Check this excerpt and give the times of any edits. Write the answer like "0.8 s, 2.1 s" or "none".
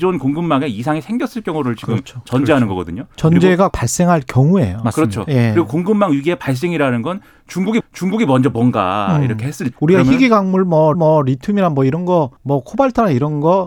3.7 s, 7.8 s, 9.7 s, 10.9 s, 12.4 s